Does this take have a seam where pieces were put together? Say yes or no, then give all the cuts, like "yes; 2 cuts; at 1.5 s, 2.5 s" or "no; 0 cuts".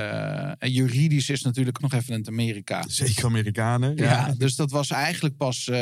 yes; 3 cuts; at 1.8 s, 2.2 s, 3.2 s